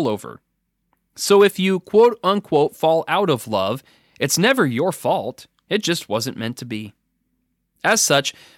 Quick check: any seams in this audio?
no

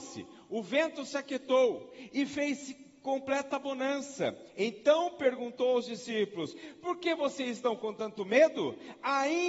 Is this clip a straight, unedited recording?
yes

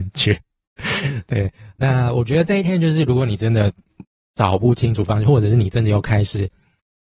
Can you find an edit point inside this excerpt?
no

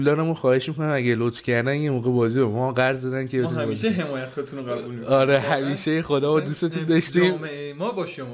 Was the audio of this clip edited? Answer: no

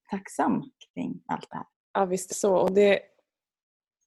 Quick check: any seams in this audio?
yes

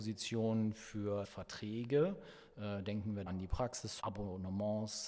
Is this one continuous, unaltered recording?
no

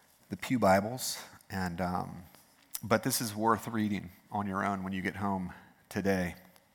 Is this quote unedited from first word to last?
yes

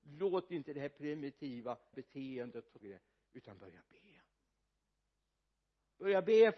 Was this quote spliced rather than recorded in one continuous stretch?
yes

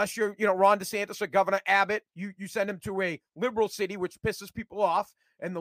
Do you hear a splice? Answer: yes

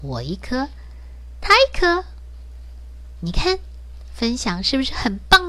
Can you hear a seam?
no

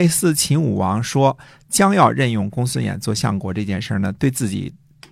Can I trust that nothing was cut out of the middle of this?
yes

